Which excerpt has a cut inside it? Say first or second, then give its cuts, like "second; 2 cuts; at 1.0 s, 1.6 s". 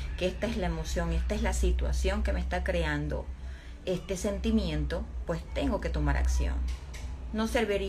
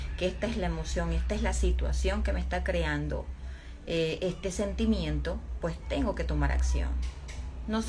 first; 1 cut; at 3.9 s